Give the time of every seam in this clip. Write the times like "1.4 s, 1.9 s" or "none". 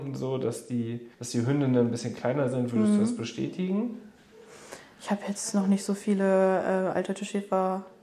1.1 s

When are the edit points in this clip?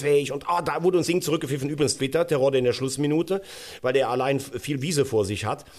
1.0 s, 2.0 s

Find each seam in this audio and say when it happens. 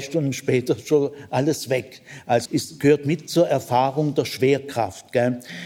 2.5 s

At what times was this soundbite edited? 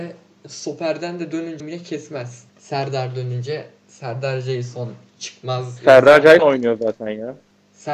1.6 s, 2.5 s, 6.4 s

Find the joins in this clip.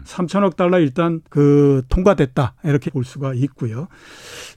1.2 s, 2.9 s

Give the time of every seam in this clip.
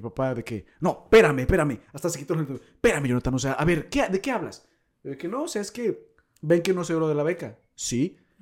none

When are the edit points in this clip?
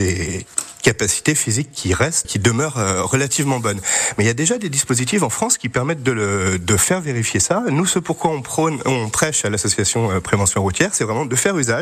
2.2 s

